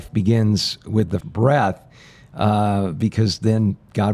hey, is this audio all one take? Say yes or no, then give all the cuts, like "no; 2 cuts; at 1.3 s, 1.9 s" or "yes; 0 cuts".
no; 1 cut; at 1.2 s